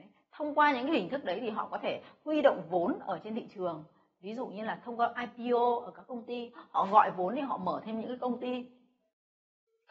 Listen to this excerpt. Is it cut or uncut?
uncut